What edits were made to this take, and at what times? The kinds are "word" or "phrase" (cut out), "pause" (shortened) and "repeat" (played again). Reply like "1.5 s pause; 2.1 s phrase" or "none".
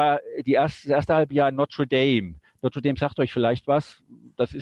none